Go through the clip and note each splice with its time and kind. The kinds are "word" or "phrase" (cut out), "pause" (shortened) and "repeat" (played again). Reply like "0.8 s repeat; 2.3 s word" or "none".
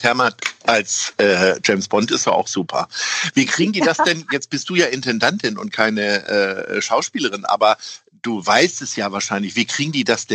none